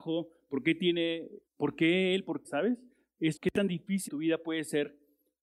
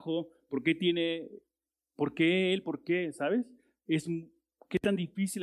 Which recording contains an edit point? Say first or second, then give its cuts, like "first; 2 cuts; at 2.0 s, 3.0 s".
first; 4 cuts; at 1.5 s, 2.4 s, 3.4 s, 4.1 s